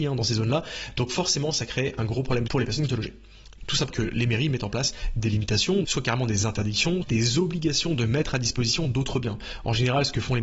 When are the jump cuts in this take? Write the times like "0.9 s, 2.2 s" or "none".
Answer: 2.5 s, 2.9 s, 3.6 s, 3.9 s, 5.8 s, 7.0 s